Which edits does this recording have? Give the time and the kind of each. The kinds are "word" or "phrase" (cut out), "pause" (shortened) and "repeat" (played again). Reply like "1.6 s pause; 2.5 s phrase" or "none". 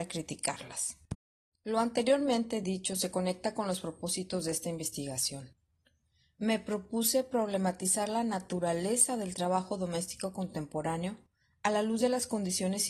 none

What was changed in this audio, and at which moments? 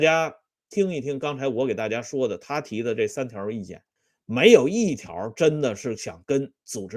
4.0 s pause

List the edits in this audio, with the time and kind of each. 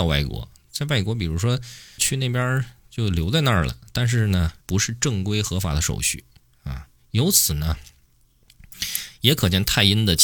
2.0 s word; 4.6 s pause

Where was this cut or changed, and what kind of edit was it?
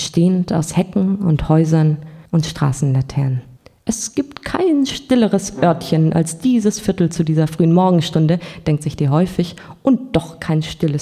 2.3 s pause; 3.6 s pause

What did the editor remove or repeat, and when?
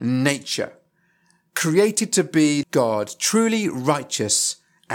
2.6 s word

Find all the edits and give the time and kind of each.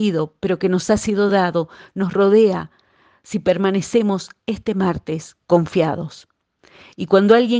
none

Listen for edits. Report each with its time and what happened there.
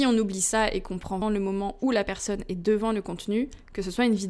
1.2 s word

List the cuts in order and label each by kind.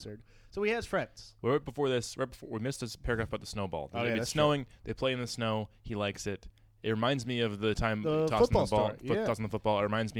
none

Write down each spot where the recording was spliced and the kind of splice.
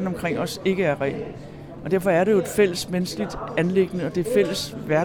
none

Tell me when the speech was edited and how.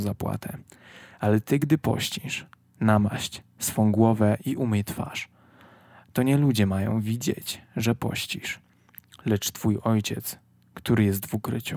none

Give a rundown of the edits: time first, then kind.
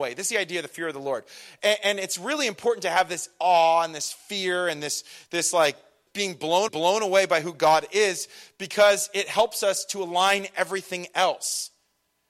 6.1 s word; 6.7 s repeat

